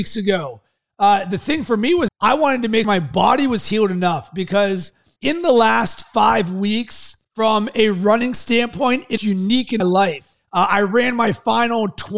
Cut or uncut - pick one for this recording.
cut